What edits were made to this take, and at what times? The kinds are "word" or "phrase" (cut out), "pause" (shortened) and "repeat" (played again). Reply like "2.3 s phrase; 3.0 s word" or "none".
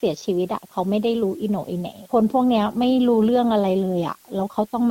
2.1 s pause